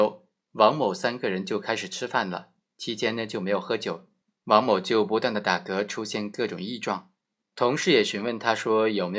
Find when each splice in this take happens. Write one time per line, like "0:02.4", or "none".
0:04.2
0:07.2